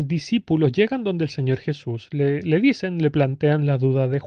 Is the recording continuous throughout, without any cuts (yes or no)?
yes